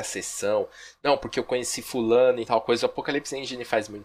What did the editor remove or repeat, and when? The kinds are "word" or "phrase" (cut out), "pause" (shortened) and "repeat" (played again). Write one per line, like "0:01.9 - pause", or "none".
none